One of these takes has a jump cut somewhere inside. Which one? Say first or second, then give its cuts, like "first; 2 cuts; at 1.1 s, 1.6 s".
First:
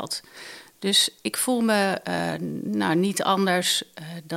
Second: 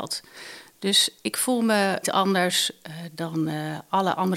second; 1 cut; at 2.0 s